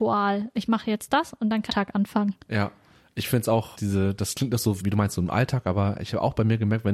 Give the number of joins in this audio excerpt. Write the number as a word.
three